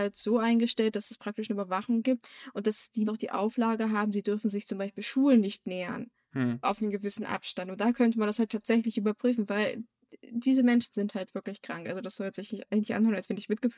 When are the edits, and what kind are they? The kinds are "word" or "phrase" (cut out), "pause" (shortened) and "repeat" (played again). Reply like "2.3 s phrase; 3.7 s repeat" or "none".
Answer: 3.0 s word; 6.2 s pause

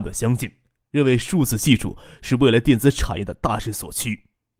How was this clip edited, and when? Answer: none

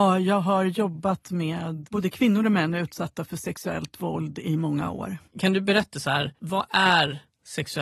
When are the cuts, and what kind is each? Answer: 5.3 s pause; 5.9 s word

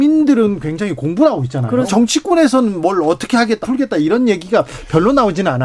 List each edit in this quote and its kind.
1.9 s word; 3.6 s word

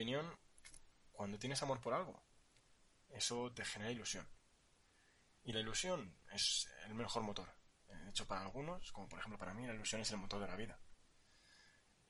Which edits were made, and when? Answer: none

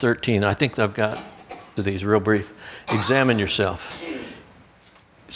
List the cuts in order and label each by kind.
1.8 s word

